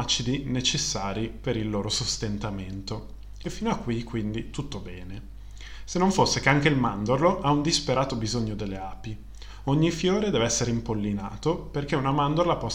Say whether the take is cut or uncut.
uncut